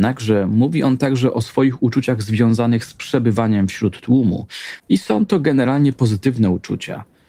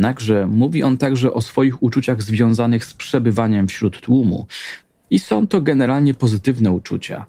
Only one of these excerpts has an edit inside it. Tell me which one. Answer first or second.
first